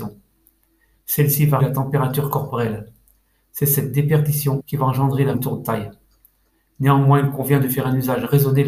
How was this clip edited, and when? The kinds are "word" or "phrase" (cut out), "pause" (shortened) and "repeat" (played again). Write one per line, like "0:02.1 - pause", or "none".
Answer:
0:01.6 - word
0:04.6 - word
0:05.3 - word